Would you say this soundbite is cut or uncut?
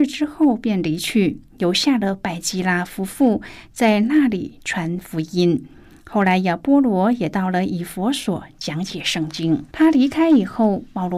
cut